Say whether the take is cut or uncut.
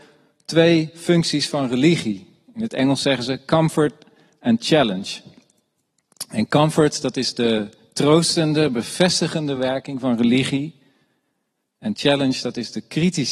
uncut